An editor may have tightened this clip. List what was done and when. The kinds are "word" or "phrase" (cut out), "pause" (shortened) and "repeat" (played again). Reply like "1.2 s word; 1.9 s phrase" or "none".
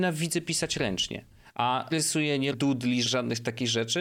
1.9 s word; 2.5 s word; 3.1 s word